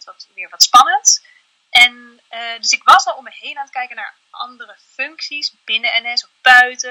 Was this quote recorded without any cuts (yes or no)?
yes